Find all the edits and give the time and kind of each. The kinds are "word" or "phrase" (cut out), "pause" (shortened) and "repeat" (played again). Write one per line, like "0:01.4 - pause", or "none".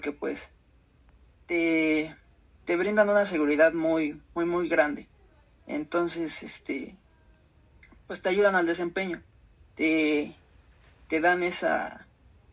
none